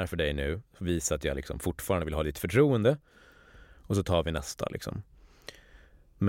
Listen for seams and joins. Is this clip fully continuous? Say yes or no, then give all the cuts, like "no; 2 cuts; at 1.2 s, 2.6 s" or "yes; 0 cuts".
yes; 0 cuts